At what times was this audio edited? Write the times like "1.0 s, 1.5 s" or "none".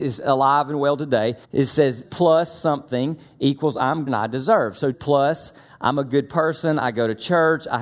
1.4 s, 2.0 s, 4.1 s, 4.9 s